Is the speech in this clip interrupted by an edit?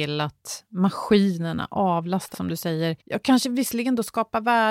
yes; 2 cuts; at 2.3 s, 3.0 s

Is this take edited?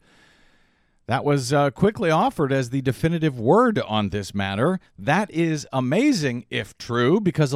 no; 0 cuts

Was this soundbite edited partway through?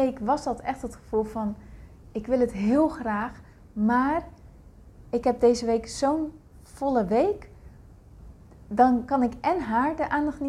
no; 0 cuts

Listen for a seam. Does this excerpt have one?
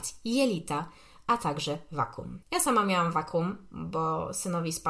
yes; 1 cut; at 2.4 s

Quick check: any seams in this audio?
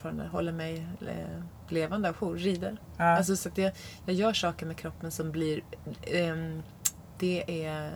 no; 0 cuts

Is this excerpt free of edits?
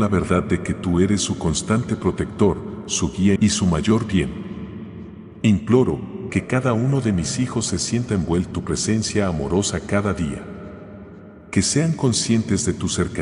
no; 3 cuts; at 3.4 s, 6.3 s, 8.5 s

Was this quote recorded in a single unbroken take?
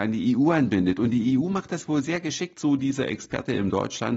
yes; 0 cuts

